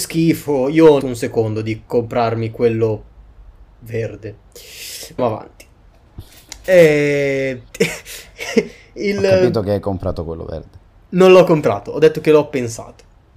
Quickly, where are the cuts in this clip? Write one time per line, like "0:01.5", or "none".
0:01.0
0:01.9
0:05.2
0:07.7